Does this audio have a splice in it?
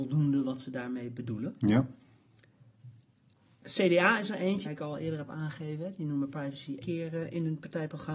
yes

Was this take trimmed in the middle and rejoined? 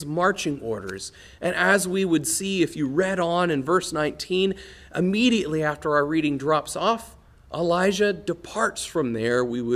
no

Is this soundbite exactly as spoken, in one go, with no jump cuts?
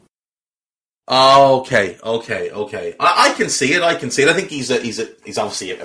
yes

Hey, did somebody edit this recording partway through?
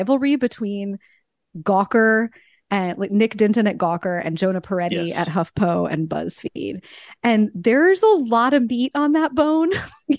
no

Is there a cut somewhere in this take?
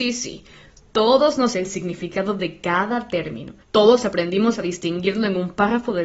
yes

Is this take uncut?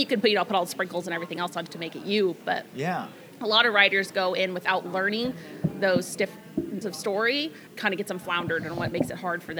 no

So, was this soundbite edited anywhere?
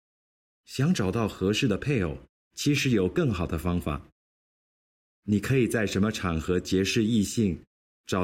no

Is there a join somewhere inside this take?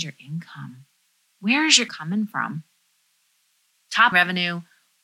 yes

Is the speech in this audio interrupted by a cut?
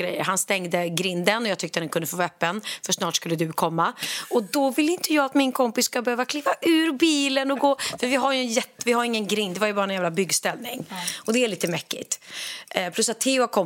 no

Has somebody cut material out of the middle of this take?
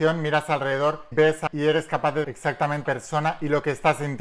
yes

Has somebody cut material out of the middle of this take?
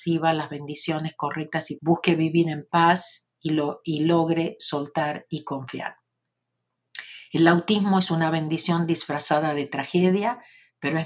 yes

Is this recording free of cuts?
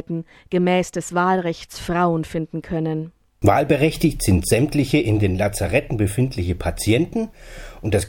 yes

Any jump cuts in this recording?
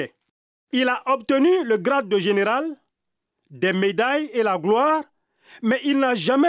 no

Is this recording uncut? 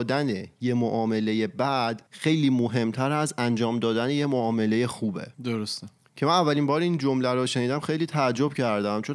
no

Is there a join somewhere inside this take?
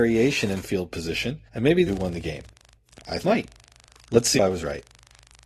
yes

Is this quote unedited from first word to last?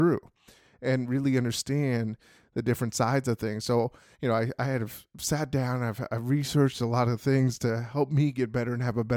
yes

